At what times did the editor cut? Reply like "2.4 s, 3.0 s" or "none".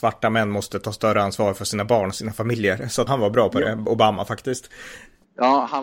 3.1 s